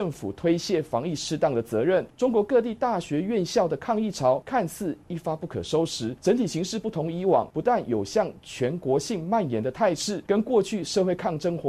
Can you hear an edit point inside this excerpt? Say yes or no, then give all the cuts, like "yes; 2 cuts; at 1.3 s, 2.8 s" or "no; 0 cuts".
no; 0 cuts